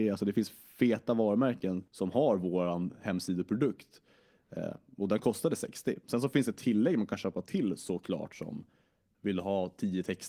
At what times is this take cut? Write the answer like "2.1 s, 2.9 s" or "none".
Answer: 1.9 s